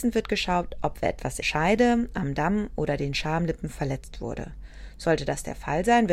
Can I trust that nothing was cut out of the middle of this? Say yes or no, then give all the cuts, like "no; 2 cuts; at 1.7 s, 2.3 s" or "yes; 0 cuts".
no; 1 cut; at 1.4 s